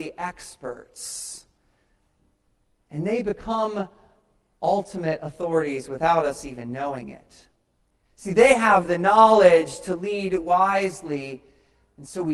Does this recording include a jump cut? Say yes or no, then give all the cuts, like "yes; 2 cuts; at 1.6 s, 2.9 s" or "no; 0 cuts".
no; 0 cuts